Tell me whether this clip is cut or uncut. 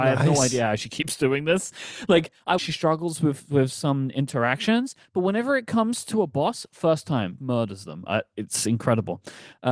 cut